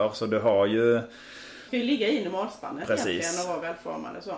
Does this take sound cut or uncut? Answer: cut